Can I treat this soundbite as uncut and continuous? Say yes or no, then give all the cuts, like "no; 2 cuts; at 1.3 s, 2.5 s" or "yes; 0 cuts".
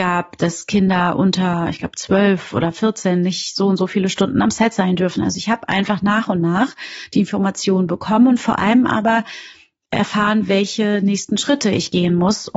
yes; 0 cuts